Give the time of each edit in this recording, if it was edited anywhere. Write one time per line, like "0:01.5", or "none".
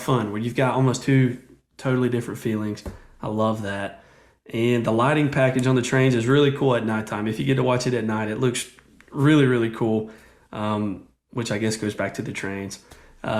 none